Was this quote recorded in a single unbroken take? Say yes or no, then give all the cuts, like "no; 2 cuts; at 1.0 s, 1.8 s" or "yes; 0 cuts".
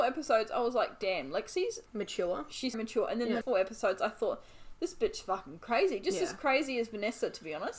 no; 3 cuts; at 1.9 s, 2.7 s, 3.4 s